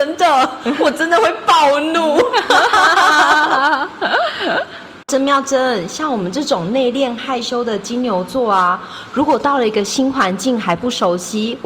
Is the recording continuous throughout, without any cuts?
no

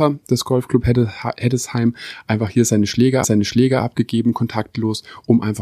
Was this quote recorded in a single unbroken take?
no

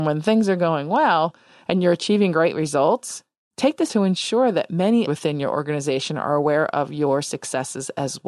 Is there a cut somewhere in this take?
yes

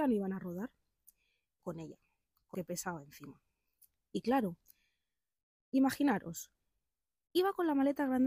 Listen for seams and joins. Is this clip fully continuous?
no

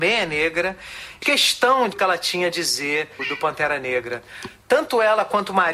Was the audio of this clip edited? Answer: yes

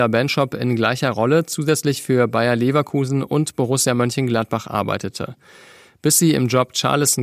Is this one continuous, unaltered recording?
yes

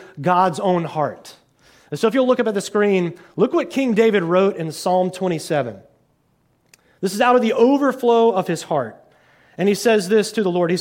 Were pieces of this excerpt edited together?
no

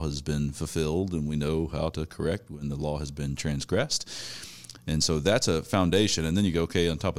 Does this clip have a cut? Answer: no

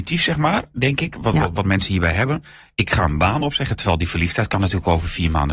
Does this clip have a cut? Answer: no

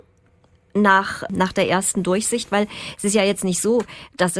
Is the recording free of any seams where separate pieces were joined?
yes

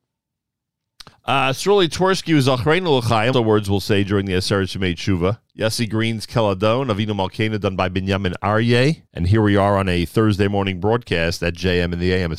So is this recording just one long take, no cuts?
no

